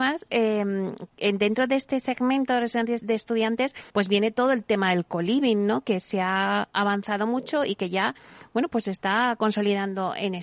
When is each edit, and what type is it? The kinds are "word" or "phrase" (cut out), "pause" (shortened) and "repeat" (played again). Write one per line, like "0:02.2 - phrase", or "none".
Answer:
0:03.0 - word
0:03.9 - pause